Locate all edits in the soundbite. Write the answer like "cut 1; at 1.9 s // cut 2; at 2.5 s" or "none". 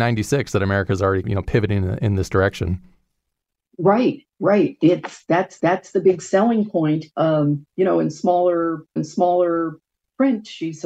cut 1; at 1.2 s // cut 2; at 4.3 s // cut 3; at 5.6 s // cut 4; at 7.1 s // cut 5; at 9.0 s